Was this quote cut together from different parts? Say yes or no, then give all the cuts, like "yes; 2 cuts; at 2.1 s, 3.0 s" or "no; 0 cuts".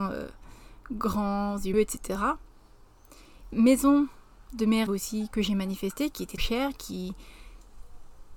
yes; 5 cuts; at 1.7 s, 3.5 s, 4.9 s, 5.3 s, 6.4 s